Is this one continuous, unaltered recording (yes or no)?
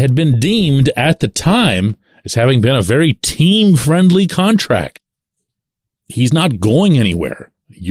yes